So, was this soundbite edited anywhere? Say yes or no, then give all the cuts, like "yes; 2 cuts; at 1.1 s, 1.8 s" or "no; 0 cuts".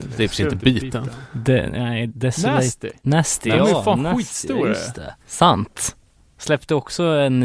yes; 1 cut; at 5.2 s